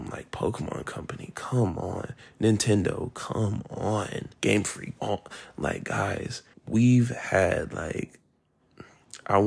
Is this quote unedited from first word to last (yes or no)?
no